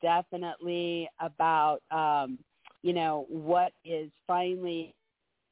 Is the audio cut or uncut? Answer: cut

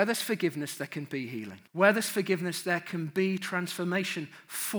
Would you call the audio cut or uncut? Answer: cut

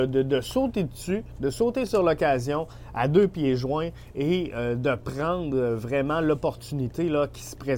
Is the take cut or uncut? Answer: uncut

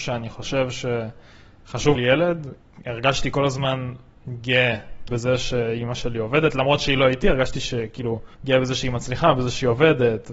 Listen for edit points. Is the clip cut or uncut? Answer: cut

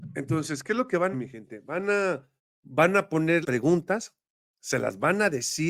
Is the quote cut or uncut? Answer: cut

